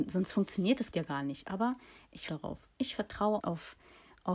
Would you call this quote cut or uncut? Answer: cut